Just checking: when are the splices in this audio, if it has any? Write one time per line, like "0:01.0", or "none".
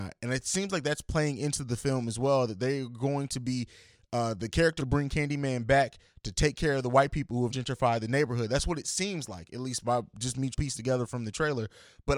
0:04.8
0:07.5
0:10.5